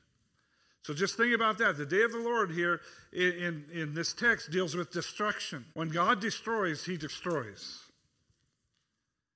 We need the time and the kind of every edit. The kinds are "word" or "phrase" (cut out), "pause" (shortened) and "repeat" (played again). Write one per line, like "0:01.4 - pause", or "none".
0:05.7 - pause